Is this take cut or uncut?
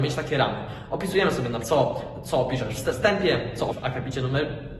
cut